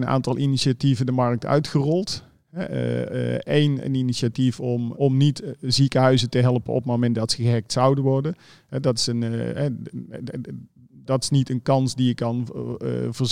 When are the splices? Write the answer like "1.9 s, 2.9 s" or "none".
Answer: 4.9 s